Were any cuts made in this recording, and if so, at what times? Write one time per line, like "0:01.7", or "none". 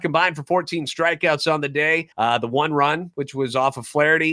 0:02.1

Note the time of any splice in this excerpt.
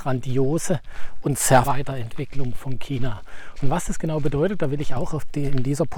0:01.6

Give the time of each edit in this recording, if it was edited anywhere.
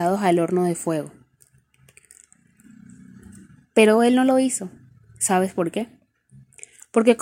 none

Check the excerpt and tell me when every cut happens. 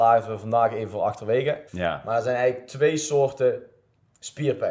0:01.7

